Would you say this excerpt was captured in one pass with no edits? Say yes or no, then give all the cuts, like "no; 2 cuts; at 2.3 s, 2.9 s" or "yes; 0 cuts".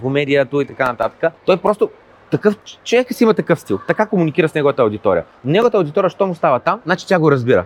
no; 1 cut; at 1.4 s